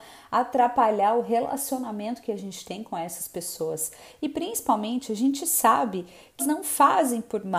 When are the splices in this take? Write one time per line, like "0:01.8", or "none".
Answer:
0:06.4